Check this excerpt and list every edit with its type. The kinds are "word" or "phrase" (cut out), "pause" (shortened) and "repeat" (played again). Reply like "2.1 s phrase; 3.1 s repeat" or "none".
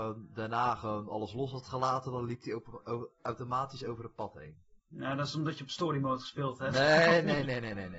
4.8 s pause